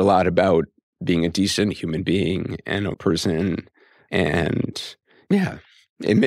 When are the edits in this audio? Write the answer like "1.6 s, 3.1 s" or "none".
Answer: 2.9 s